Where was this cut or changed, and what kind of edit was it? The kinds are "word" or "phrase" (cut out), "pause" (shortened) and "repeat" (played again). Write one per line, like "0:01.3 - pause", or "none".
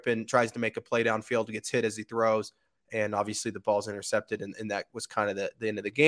none